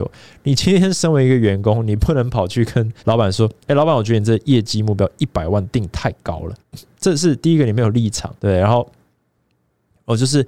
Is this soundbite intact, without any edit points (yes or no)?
no